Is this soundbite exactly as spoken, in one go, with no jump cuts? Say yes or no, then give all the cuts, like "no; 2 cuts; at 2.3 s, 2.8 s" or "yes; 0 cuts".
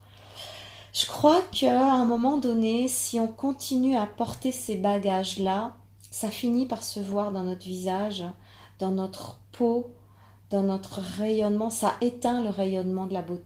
yes; 0 cuts